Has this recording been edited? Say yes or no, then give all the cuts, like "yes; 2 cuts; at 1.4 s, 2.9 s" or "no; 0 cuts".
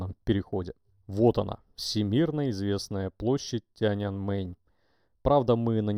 yes; 1 cut; at 0.9 s